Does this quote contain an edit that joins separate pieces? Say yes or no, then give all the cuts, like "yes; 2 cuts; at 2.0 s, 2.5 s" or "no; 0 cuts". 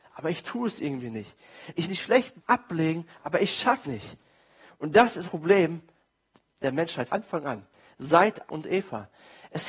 yes; 6 cuts; at 1.9 s, 2.4 s, 3.8 s, 5.2 s, 7.1 s, 8.5 s